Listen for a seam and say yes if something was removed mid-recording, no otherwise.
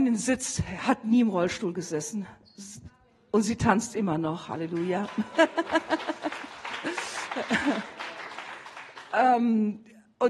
no